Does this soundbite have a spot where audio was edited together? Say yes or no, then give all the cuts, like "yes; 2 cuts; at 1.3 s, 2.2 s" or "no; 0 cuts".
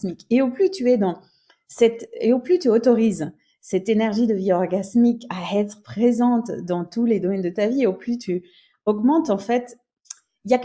no; 0 cuts